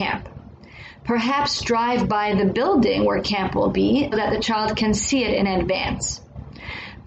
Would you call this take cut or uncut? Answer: cut